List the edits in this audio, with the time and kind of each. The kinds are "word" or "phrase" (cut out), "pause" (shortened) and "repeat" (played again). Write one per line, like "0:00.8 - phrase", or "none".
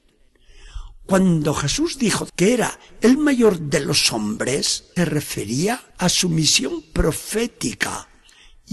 0:02.3 - word
0:05.0 - word
0:05.9 - pause